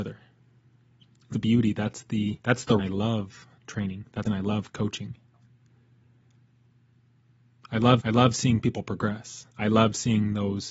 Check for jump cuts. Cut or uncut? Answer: cut